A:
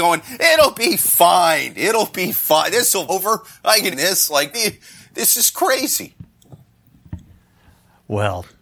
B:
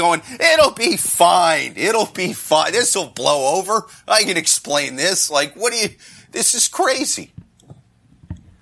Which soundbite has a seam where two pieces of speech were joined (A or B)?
A